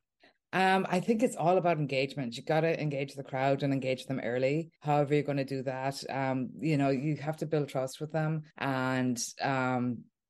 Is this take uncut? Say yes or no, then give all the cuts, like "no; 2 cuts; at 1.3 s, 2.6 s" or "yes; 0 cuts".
no; 2 cuts; at 4.8 s, 8.5 s